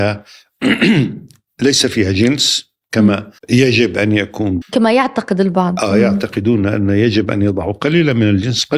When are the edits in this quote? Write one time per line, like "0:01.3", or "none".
0:03.4
0:04.6